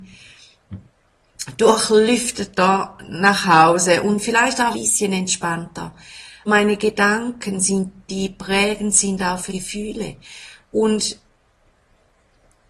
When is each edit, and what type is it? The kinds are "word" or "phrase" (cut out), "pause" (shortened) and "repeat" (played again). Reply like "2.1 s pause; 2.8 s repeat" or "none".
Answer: 4.7 s word; 6.5 s word; 8.1 s word; 9.5 s word